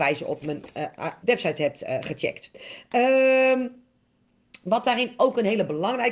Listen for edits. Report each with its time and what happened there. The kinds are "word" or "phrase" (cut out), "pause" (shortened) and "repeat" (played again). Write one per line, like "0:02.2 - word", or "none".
0:01.2 - word